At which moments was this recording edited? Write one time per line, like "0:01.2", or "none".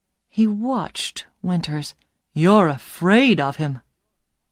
0:02.2